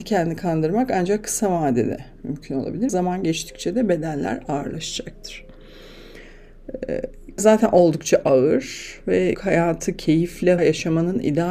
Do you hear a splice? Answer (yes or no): yes